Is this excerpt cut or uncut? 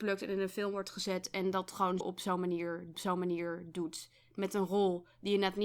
cut